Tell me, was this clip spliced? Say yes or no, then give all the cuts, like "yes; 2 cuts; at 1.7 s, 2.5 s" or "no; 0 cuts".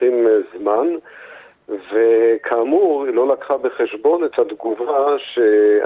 no; 0 cuts